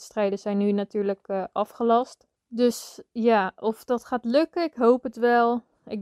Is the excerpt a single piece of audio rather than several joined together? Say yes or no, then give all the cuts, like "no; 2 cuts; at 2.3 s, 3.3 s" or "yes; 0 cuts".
no; 1 cut; at 2.4 s